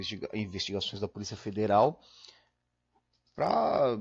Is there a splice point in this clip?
no; 0 cuts

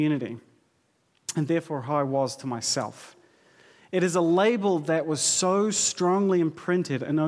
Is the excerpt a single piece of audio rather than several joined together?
yes; 0 cuts

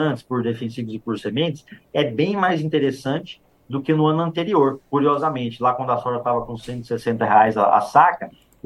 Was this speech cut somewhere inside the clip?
no; 0 cuts

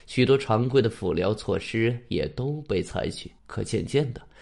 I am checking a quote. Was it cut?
yes; 1 cut; at 3.4 s

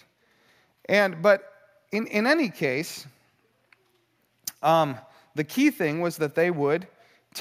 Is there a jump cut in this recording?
no; 0 cuts

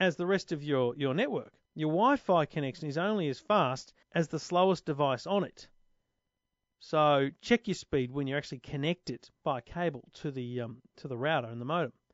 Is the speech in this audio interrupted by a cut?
yes; 2 cuts; at 1.7 s, 4.0 s

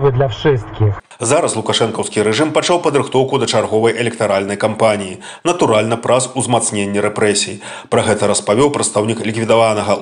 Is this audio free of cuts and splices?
yes; 0 cuts

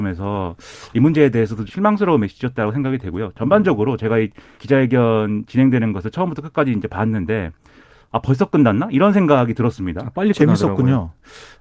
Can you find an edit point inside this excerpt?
yes; 2 cuts; at 1.7 s, 4.6 s

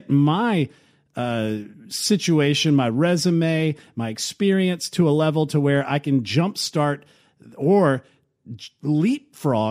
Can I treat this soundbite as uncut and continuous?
yes; 0 cuts

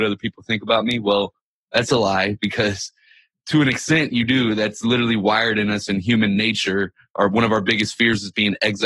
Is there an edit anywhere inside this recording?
no; 0 cuts

